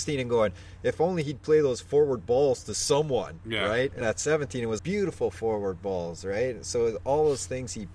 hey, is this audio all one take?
no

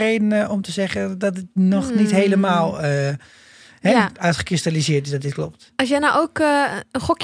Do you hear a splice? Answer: no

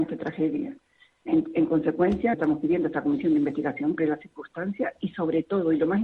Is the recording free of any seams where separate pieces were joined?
no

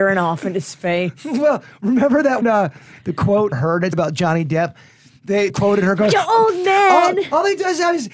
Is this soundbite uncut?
no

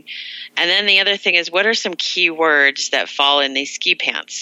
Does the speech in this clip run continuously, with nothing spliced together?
yes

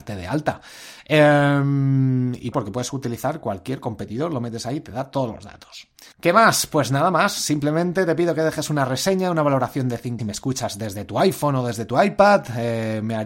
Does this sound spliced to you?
yes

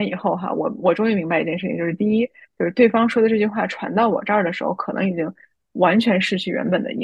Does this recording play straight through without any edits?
yes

